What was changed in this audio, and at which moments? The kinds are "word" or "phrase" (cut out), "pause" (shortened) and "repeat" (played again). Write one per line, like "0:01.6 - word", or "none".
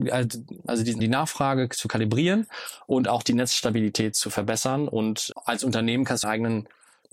0:01.0 - phrase
0:05.3 - word
0:06.2 - phrase